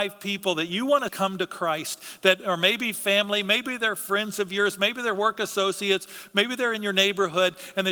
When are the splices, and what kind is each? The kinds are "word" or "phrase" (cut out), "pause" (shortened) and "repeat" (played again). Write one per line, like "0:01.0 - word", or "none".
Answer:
0:01.1 - word